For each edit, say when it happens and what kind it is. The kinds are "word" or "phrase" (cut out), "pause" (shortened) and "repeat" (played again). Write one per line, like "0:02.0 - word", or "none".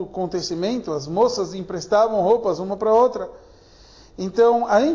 none